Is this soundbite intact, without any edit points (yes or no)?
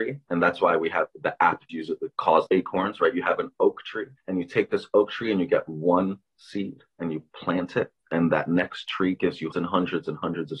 no